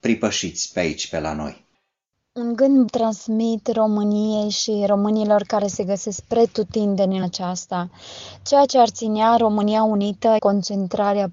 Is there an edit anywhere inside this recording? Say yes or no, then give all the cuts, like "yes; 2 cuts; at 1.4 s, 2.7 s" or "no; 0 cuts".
yes; 3 cuts; at 2.9 s, 7.2 s, 10.4 s